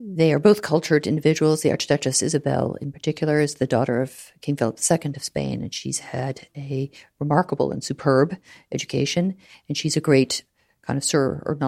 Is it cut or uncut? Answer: uncut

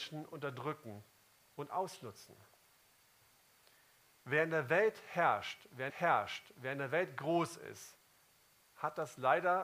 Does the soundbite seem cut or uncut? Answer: cut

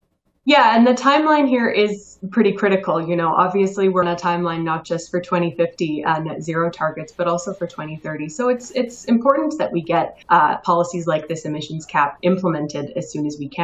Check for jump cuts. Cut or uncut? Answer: cut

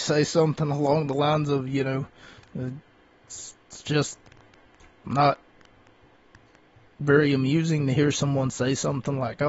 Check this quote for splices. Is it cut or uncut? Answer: cut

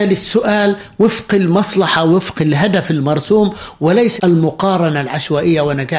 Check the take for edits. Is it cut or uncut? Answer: cut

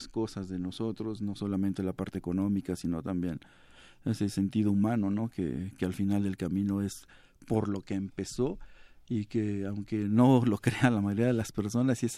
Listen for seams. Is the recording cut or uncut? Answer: uncut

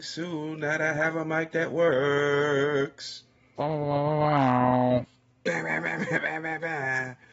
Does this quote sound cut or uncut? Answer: uncut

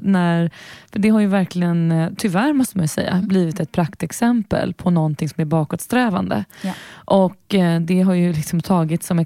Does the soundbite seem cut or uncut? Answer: uncut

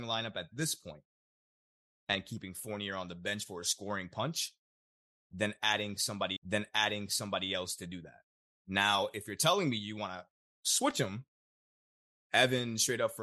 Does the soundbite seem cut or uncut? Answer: cut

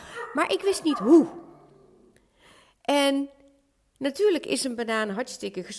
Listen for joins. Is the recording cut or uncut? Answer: uncut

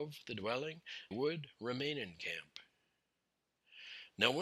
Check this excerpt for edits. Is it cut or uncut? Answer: cut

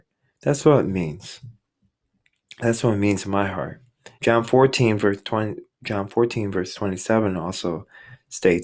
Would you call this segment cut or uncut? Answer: cut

